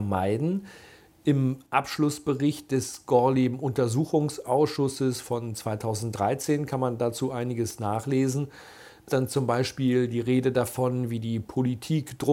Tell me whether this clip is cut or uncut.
cut